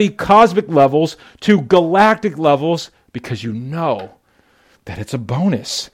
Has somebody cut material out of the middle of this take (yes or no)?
no